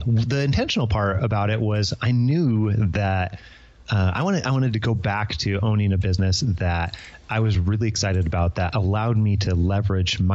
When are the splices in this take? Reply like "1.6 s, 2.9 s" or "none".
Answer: none